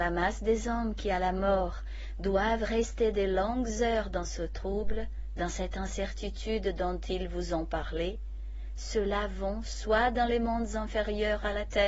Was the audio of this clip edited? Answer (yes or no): no